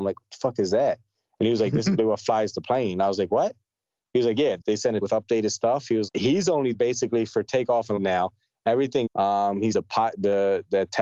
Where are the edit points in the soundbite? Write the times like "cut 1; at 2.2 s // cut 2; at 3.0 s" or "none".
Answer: cut 1; at 2.0 s // cut 2; at 4.6 s // cut 3; at 5.0 s // cut 4; at 6.1 s // cut 5; at 6.7 s // cut 6; at 8.0 s // cut 7; at 9.1 s // cut 8; at 9.7 s